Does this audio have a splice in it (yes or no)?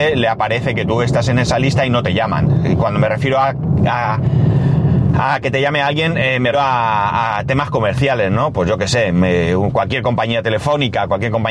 yes